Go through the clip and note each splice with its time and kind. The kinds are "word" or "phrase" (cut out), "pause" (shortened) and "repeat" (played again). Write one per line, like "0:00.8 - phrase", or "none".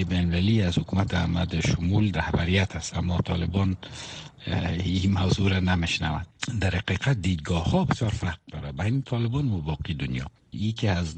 0:02.1 - word